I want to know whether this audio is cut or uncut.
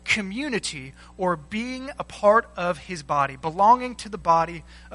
uncut